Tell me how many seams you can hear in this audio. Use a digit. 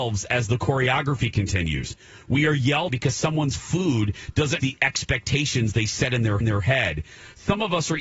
3